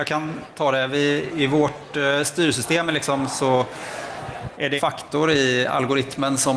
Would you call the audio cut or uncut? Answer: cut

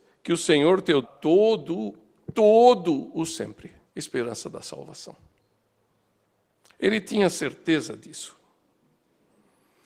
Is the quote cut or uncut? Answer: cut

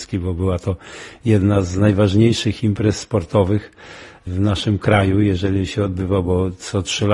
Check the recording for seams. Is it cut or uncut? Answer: uncut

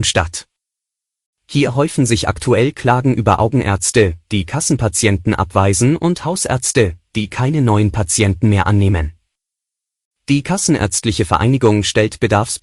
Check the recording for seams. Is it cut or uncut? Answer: uncut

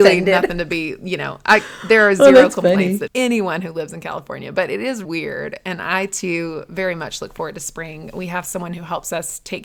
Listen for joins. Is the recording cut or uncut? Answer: cut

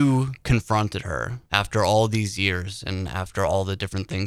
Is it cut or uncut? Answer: cut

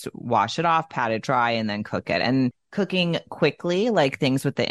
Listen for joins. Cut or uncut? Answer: uncut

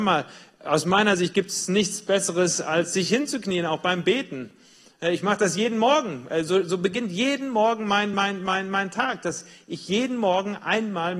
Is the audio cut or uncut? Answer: uncut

